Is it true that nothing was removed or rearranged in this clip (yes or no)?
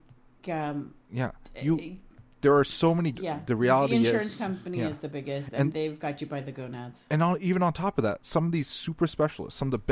no